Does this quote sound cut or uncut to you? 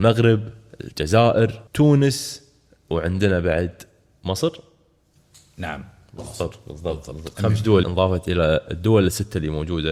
cut